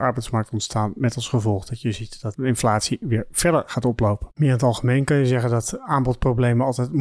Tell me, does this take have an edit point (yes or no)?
yes